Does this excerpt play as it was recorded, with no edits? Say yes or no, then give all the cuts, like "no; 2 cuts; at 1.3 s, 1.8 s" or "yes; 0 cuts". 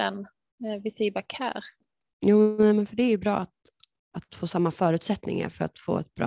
yes; 0 cuts